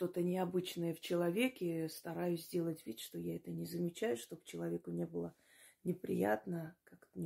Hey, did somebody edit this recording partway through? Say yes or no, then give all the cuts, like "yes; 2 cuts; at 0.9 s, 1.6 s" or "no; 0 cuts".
no; 0 cuts